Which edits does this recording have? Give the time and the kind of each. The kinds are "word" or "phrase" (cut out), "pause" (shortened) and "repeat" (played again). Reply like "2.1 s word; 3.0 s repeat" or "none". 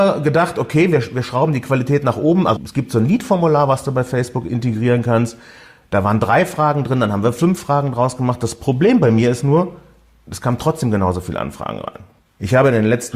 2.6 s word